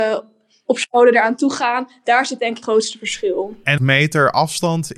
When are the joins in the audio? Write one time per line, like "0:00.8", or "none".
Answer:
0:02.6
0:03.8